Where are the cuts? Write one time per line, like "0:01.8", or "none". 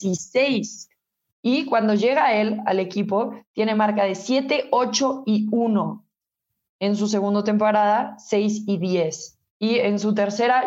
none